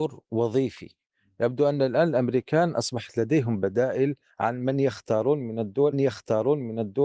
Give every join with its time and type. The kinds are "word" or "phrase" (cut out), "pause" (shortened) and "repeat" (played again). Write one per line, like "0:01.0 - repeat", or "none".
0:05.9 - repeat

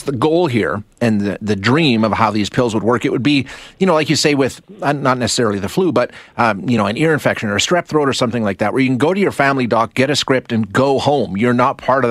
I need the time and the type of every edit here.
none

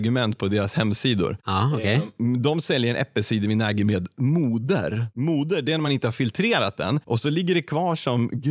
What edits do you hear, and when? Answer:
none

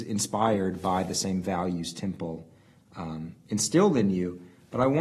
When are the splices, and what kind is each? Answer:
none

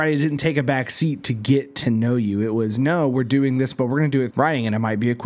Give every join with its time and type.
0:04.3 - word

